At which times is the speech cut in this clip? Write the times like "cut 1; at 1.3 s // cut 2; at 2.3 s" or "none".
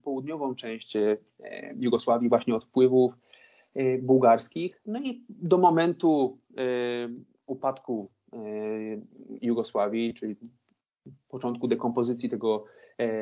none